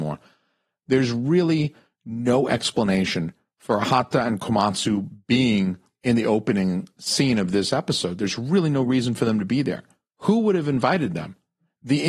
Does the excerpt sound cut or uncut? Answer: uncut